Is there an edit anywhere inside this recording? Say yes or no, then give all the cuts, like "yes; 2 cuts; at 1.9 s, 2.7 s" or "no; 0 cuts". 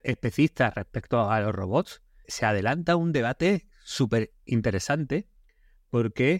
yes; 1 cut; at 2.2 s